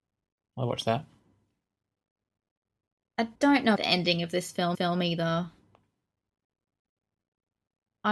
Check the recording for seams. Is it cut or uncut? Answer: cut